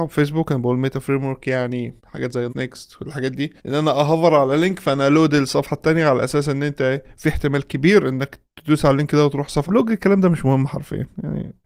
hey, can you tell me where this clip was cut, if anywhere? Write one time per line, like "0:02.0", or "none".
0:02.0
0:02.5
0:03.6
0:09.7